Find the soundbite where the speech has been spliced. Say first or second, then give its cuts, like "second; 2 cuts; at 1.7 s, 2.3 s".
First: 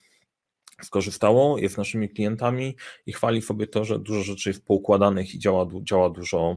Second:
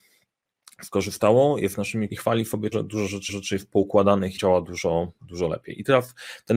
second; 4 cuts; at 2.1 s, 2.7 s, 3.3 s, 4.4 s